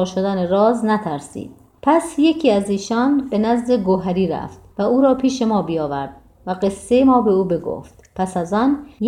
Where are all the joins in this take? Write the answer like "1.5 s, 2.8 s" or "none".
none